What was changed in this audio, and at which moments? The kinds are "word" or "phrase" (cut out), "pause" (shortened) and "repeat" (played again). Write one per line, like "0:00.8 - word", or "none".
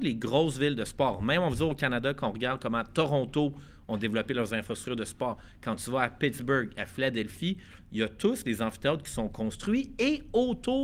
none